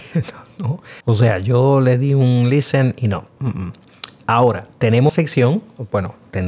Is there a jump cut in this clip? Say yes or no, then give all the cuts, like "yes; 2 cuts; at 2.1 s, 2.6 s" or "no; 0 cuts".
yes; 3 cuts; at 1.0 s, 3.4 s, 5.1 s